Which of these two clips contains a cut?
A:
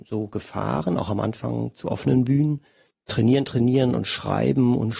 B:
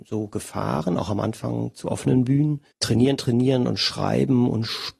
B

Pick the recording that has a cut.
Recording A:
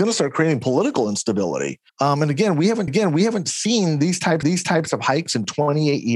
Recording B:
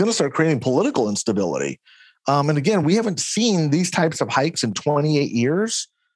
A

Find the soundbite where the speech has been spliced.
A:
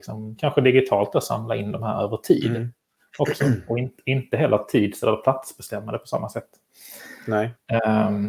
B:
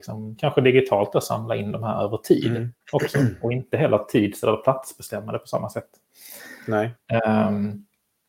B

